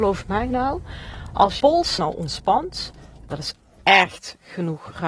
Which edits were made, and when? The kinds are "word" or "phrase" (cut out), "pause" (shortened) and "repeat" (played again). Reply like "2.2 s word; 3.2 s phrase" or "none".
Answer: 1.6 s word; 2.0 s word